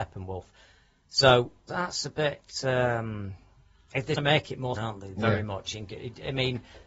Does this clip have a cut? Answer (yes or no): yes